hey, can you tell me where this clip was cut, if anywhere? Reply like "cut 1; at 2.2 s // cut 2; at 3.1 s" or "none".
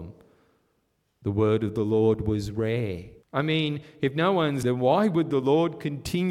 cut 1; at 3.2 s // cut 2; at 4.6 s